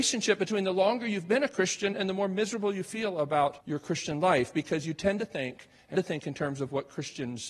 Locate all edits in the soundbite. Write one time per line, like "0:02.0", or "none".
0:03.6
0:05.9